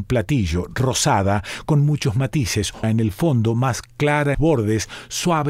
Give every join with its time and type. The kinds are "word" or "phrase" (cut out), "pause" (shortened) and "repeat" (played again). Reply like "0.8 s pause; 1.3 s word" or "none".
2.8 s word; 4.3 s phrase